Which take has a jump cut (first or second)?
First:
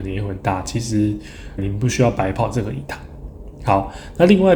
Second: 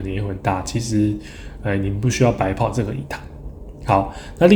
first